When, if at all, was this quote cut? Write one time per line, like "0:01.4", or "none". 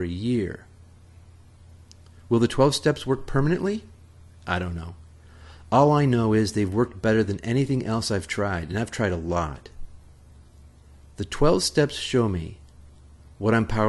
none